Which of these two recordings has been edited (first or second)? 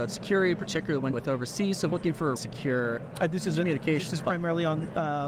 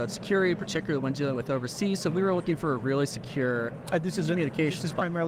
first